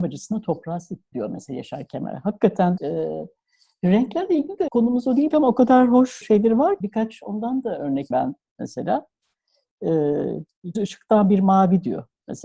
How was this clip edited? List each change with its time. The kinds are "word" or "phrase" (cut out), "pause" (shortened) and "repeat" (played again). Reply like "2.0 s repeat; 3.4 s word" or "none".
1.1 s word; 2.8 s word; 4.7 s word; 5.3 s word; 6.2 s word; 6.8 s word; 8.1 s word; 10.7 s word